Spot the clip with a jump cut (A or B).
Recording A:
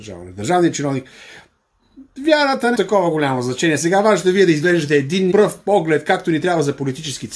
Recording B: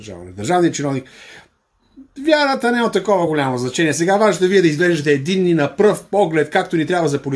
A